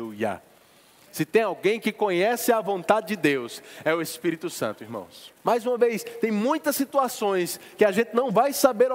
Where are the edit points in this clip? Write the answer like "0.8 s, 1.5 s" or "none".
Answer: 5.4 s